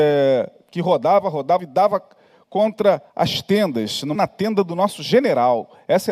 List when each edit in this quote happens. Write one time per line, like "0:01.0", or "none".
0:01.6
0:03.1
0:04.1